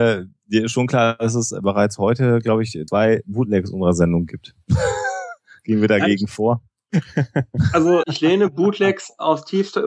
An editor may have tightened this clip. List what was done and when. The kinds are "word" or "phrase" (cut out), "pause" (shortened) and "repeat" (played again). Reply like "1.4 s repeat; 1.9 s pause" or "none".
2.9 s word; 8.0 s word

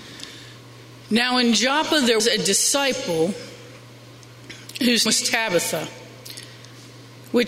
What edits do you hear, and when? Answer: 2.2 s word; 5.1 s word

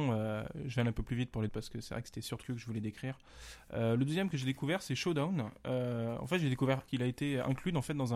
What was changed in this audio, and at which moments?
1.5 s phrase; 2.4 s word; 6.9 s phrase

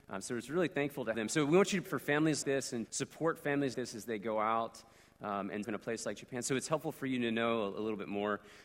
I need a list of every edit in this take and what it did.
1.1 s word; 1.9 s word; 2.4 s word; 2.9 s word; 3.7 s word; 5.6 s word

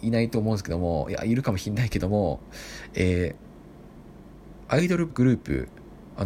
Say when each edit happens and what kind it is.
5.1 s word

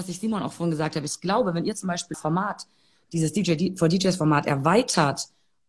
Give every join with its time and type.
2.1 s word

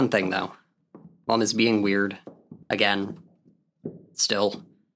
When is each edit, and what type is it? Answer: 2.6 s pause

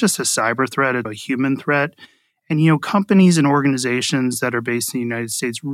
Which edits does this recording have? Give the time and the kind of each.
1.0 s word

